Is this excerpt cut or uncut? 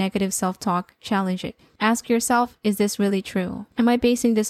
uncut